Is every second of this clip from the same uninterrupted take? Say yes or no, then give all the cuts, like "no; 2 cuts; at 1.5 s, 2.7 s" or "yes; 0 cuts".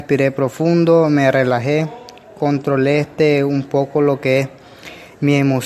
yes; 0 cuts